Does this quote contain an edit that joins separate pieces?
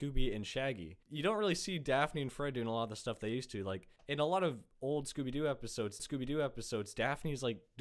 yes; 3 cuts; at 1.0 s, 4.0 s, 6.0 s

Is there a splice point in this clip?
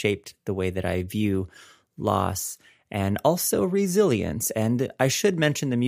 no; 0 cuts

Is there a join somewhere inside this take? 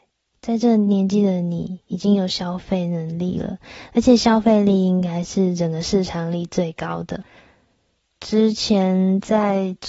no; 0 cuts

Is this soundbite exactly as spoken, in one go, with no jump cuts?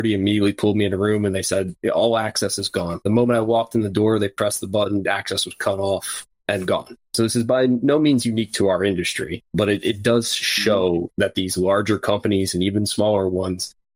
no; 2 cuts; at 6.4 s, 9.5 s

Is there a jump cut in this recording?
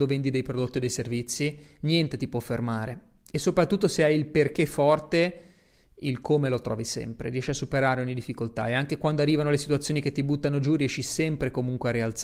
no; 0 cuts

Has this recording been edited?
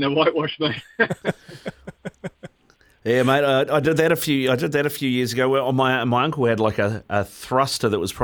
no; 0 cuts

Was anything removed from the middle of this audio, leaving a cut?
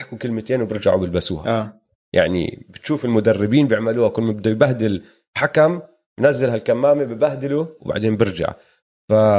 no; 0 cuts

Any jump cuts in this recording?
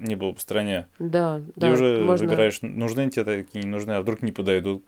no; 0 cuts

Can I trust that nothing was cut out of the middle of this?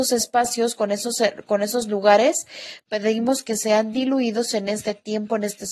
yes; 0 cuts

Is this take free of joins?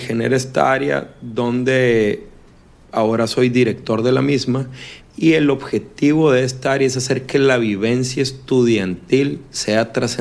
yes; 0 cuts

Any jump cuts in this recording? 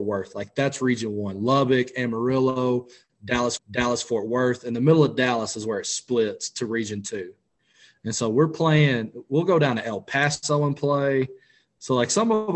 yes; 1 cut; at 3.6 s

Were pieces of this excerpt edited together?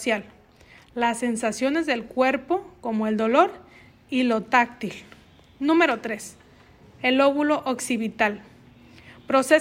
no; 0 cuts

